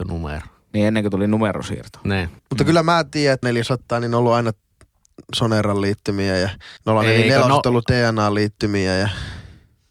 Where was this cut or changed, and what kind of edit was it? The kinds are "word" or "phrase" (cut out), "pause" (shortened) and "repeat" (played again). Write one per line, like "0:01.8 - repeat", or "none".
0:02.4 - pause
0:03.4 - word
0:06.8 - pause